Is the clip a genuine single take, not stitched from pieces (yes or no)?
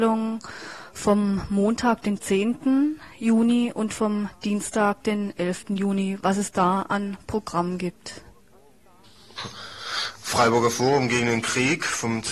yes